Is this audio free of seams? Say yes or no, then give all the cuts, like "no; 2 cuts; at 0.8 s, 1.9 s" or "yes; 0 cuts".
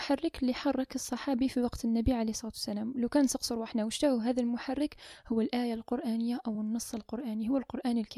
yes; 0 cuts